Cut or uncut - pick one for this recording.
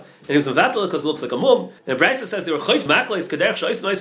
cut